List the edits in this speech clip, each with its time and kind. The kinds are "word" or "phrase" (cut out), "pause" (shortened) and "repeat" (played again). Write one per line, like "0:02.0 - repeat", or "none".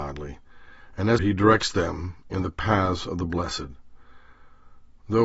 0:01.2 - phrase

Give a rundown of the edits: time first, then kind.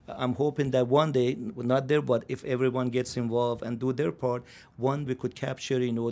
0:05.1 - word

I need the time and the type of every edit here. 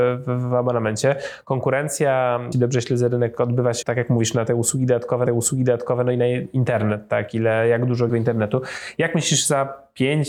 0:02.5 - word
0:03.8 - word
0:05.3 - repeat
0:08.1 - phrase

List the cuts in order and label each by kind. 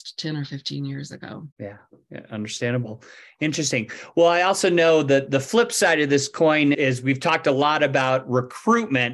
0:01.5 - pause
0:06.7 - word

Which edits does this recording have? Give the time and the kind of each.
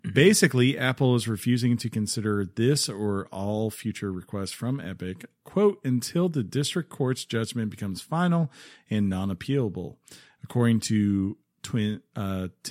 none

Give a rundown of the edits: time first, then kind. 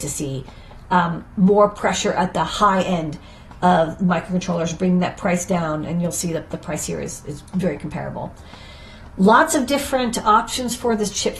none

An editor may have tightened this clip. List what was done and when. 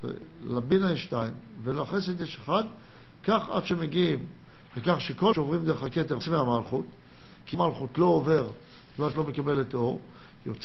0:05.3 - word
0:06.2 - word
0:07.5 - word
0:09.1 - word

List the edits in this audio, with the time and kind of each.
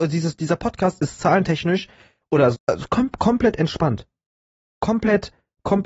0:02.5 - word

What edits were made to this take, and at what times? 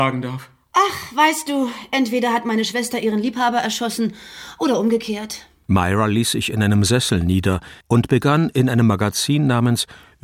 0:07.8 - pause

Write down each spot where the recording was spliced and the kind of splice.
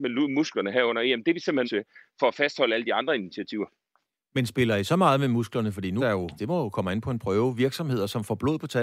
0:01.6 - word
0:06.0 - word
0:06.4 - word

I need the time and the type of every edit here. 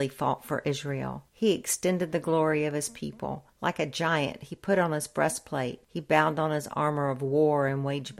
0:01.3 - pause
0:03.5 - pause
0:05.8 - pause

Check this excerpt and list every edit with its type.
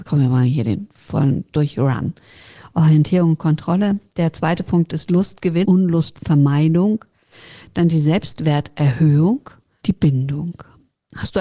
0:05.6 - phrase
0:09.8 - word

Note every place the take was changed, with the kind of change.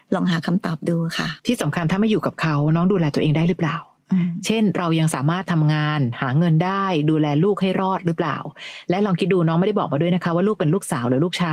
0:01.4 - pause

